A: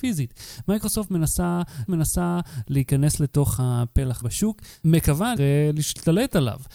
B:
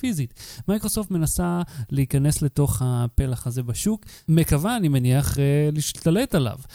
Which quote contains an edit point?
A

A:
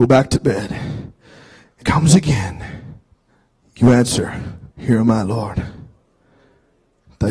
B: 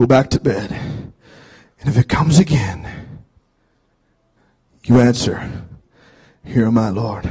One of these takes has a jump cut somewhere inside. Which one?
A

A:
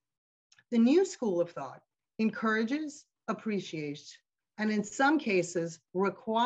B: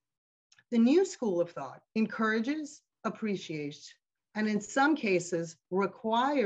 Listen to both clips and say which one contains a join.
B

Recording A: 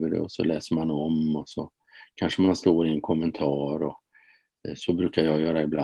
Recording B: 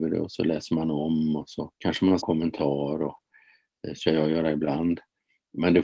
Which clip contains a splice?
B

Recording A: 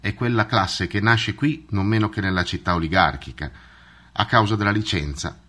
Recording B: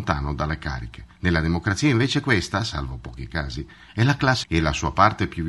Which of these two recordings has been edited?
B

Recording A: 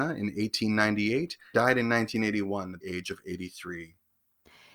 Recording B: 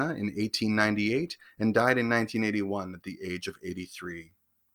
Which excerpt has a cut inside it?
A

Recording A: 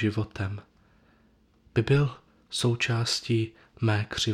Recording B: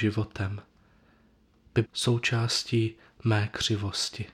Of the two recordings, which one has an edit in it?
B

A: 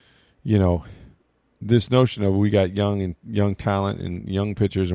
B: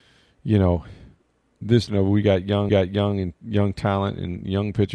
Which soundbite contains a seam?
B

